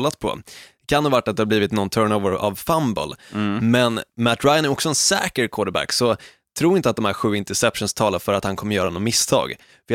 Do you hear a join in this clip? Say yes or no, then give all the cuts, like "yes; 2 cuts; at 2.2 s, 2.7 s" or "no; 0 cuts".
no; 0 cuts